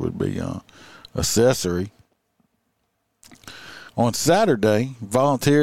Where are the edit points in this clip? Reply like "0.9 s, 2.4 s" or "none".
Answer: 3.9 s